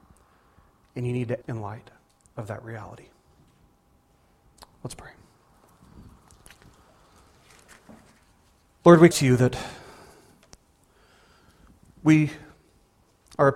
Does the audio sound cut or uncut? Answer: cut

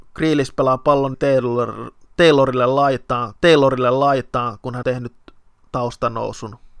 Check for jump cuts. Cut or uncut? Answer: cut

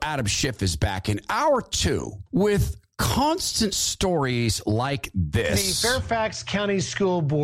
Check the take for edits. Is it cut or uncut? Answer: cut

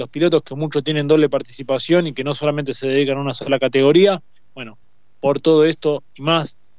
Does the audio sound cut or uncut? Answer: uncut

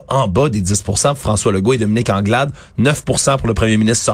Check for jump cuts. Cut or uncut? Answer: uncut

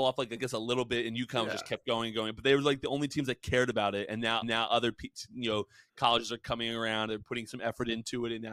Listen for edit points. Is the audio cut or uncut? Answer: cut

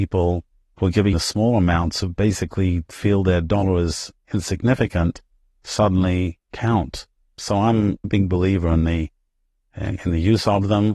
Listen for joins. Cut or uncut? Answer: cut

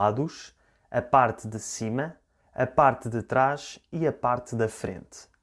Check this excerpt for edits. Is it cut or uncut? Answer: uncut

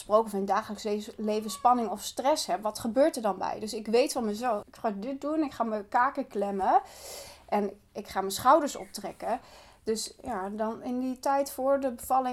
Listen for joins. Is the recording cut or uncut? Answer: cut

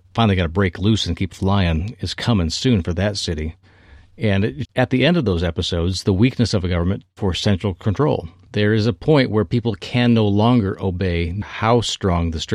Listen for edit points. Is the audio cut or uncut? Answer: cut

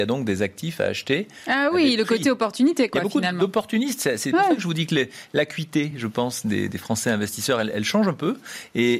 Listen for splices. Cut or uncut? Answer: uncut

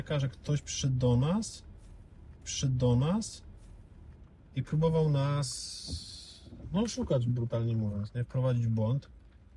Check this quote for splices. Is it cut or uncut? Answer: cut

